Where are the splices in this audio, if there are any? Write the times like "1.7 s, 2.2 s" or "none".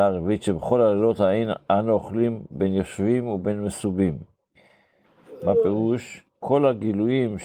6.3 s